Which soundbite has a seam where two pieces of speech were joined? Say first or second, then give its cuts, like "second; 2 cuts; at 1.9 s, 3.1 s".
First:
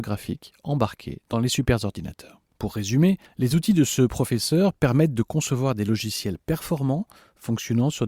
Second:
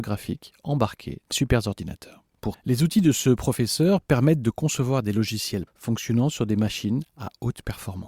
second; 3 cuts; at 1.3 s, 2.5 s, 5.7 s